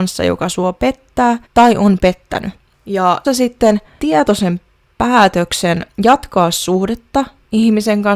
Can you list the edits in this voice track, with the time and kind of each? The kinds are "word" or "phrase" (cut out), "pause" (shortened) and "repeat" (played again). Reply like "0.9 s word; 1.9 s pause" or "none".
1.5 s pause; 3.2 s word; 4.0 s word; 5.9 s pause